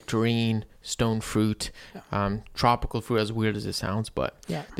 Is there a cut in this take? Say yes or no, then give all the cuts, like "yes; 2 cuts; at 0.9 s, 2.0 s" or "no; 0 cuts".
no; 0 cuts